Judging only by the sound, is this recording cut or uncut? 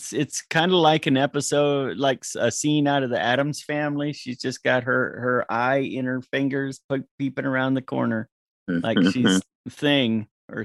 uncut